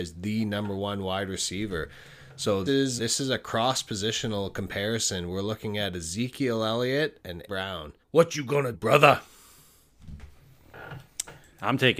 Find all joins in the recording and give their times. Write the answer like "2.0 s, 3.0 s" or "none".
2.7 s, 3.0 s, 7.5 s, 8.0 s, 8.7 s